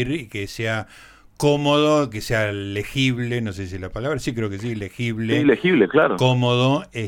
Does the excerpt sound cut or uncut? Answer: uncut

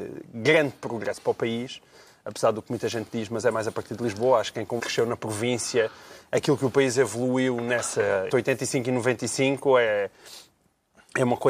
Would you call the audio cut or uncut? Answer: cut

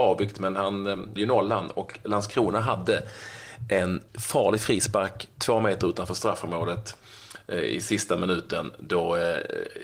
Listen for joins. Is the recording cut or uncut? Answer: cut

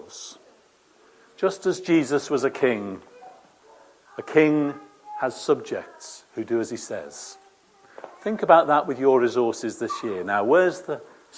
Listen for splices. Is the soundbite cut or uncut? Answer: uncut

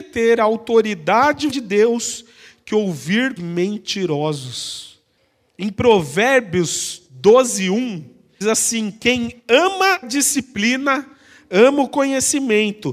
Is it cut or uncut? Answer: cut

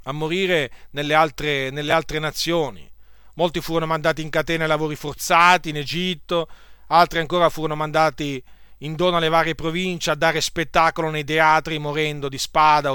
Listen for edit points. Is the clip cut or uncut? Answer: uncut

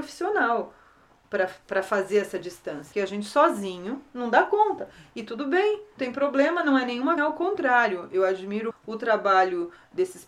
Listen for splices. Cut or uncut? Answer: cut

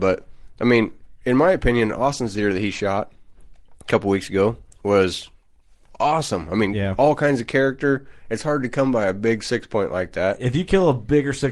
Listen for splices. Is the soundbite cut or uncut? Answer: uncut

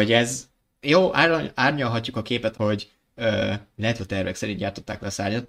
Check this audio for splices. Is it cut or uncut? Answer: cut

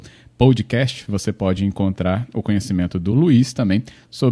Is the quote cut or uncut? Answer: uncut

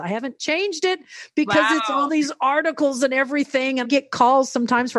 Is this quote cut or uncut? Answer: cut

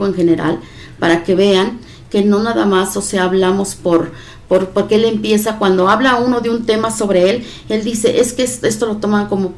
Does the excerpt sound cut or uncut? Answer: uncut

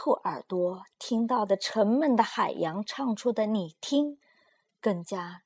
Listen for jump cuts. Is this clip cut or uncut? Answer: cut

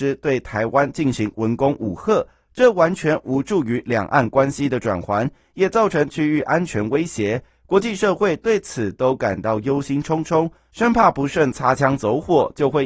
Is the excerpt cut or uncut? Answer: uncut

